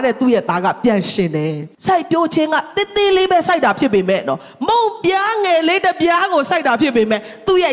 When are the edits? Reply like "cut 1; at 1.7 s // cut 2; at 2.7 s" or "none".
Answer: cut 1; at 1.7 s